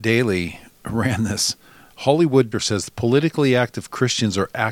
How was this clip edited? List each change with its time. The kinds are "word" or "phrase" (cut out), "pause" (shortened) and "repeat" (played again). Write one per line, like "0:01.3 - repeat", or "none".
0:02.5 - word